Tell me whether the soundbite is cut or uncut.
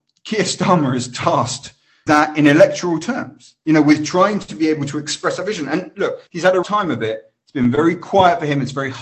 cut